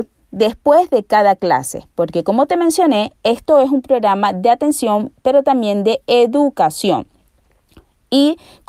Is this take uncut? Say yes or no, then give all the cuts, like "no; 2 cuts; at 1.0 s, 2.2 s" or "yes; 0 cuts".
yes; 0 cuts